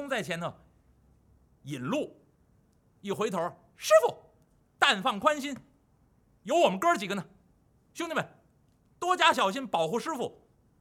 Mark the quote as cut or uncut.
uncut